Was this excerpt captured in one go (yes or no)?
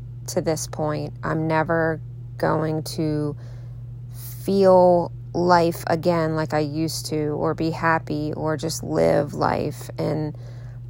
yes